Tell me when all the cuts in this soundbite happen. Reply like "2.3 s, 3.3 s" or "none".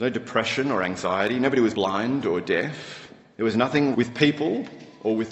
1.7 s, 3.9 s